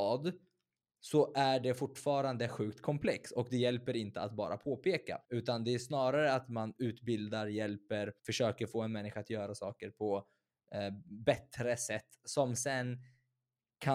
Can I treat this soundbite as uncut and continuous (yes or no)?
no